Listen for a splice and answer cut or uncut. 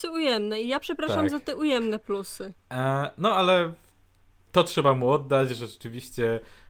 uncut